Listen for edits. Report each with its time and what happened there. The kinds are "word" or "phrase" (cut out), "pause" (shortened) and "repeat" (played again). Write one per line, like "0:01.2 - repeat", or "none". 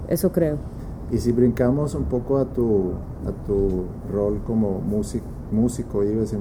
none